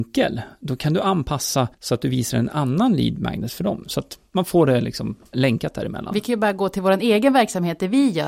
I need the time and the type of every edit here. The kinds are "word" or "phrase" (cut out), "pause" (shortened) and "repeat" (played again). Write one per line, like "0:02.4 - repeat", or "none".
0:01.7 - pause
0:05.3 - word